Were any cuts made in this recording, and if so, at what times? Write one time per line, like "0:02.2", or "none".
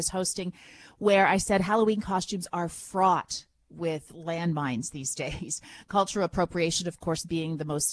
none